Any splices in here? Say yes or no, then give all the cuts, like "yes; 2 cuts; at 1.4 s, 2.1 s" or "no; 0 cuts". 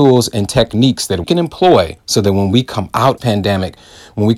yes; 3 cuts; at 1.2 s, 2.0 s, 3.2 s